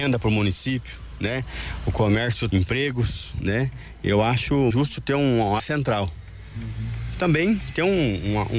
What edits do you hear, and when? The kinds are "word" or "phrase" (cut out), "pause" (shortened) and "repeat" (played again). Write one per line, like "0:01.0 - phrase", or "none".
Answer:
0:02.5 - word
0:04.7 - word
0:05.6 - word